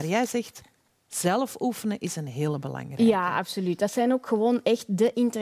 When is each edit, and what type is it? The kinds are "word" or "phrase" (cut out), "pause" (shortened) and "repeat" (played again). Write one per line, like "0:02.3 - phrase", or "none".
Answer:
none